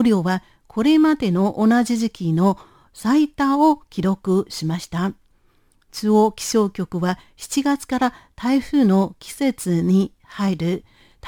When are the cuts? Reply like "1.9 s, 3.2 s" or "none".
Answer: none